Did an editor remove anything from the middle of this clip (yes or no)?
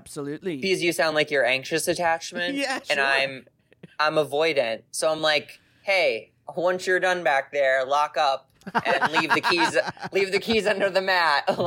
no